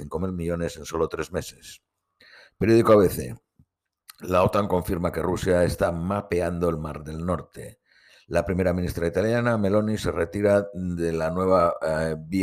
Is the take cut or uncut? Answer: uncut